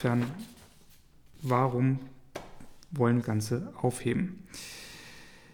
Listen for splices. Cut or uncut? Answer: cut